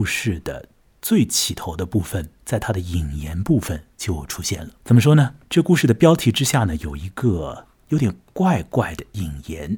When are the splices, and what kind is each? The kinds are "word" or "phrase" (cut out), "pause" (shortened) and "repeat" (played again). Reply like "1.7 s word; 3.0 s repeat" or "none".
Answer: 2.4 s pause; 4.8 s pause; 5.4 s pause; 7.8 s pause